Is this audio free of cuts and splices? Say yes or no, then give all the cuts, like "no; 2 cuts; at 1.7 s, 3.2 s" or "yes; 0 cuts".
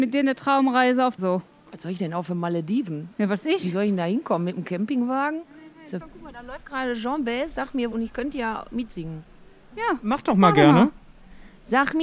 no; 3 cuts; at 1.2 s, 3.4 s, 7.9 s